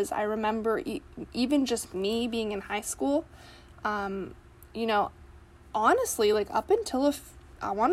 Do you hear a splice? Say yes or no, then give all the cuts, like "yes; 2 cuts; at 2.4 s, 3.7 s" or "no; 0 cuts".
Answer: no; 0 cuts